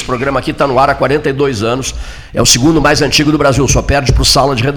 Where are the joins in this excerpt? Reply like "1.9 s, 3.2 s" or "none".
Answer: none